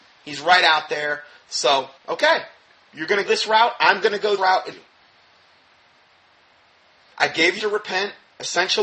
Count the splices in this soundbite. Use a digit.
5